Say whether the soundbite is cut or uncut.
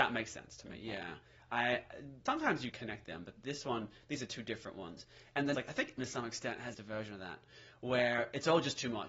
cut